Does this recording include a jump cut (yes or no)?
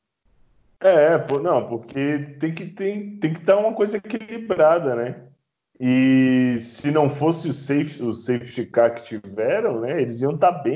no